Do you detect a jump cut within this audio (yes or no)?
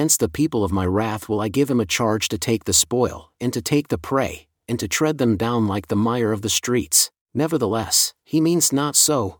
yes